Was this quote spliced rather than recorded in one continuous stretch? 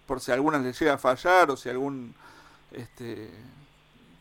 no; 0 cuts

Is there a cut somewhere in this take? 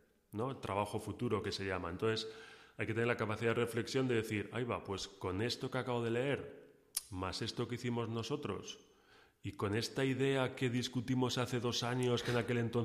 no; 0 cuts

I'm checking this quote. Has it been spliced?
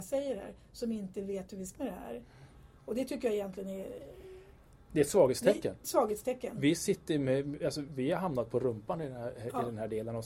yes; 3 cuts; at 1.7 s, 5.8 s, 7.9 s

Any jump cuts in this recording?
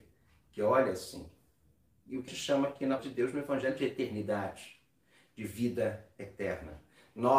yes; 2 cuts; at 2.3 s, 3.0 s

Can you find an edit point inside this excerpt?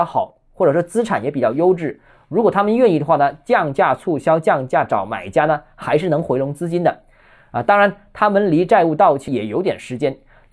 no; 0 cuts

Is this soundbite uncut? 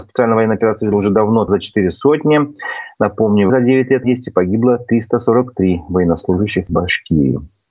no; 5 cuts; at 0.9 s, 1.5 s, 3.5 s, 4.0 s, 6.7 s

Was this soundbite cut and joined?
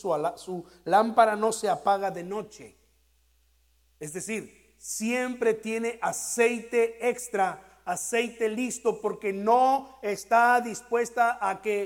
no; 0 cuts

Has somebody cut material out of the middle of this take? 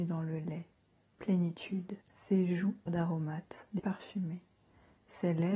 yes; 3 cuts; at 2.0 s, 2.9 s, 3.8 s

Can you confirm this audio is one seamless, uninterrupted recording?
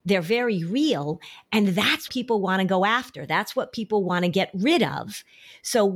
no; 1 cut; at 2.1 s

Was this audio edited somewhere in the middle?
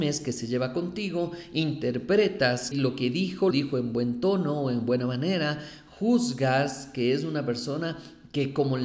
yes; 2 cuts; at 2.7 s, 3.5 s

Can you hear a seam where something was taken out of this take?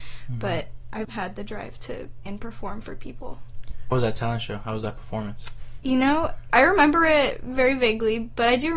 yes; 4 cuts; at 1.0 s, 2.3 s, 3.9 s, 6.5 s

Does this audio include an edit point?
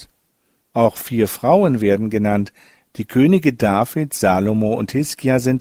no; 0 cuts

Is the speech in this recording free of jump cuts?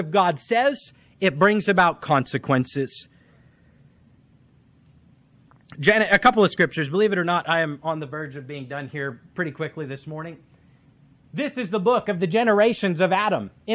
yes; 0 cuts

